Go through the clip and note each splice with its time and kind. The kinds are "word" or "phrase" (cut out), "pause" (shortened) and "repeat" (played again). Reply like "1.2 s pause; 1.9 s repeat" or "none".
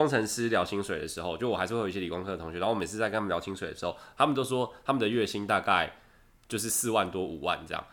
none